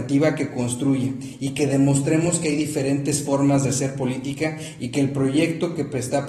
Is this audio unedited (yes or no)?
yes